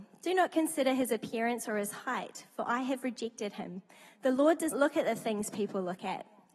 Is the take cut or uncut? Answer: cut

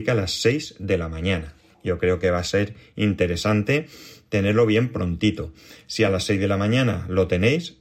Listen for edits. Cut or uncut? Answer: uncut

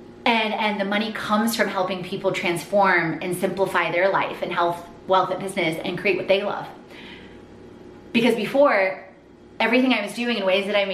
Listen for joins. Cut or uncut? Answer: uncut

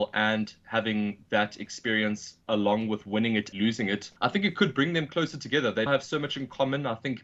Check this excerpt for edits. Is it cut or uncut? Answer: cut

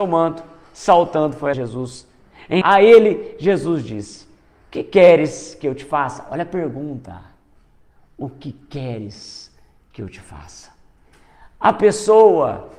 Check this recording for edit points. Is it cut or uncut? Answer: cut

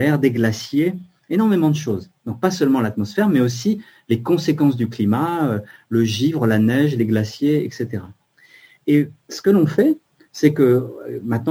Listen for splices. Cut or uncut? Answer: uncut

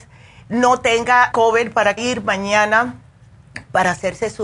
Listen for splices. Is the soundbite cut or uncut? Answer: cut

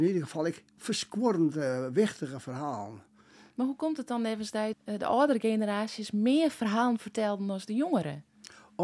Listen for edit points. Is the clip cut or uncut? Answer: cut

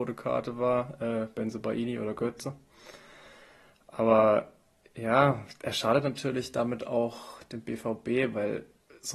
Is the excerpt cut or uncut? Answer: uncut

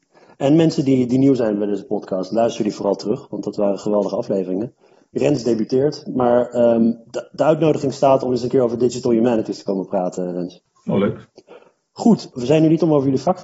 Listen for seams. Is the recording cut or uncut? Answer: uncut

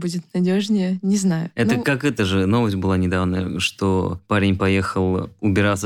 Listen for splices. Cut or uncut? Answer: uncut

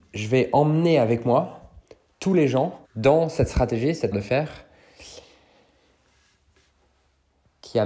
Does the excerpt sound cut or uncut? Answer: cut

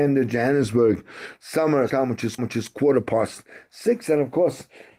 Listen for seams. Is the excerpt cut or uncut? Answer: cut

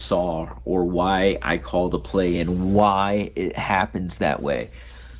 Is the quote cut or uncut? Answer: uncut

